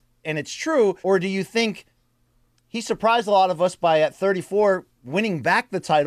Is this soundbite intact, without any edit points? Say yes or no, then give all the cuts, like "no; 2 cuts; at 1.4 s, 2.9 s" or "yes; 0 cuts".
no; 1 cut; at 1.0 s